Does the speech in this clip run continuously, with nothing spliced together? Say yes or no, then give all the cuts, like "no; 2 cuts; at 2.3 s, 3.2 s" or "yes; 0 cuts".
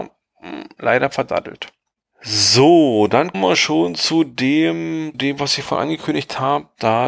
no; 2 cuts; at 3.3 s, 5.1 s